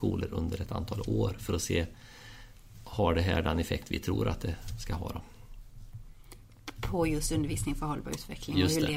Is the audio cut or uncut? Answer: uncut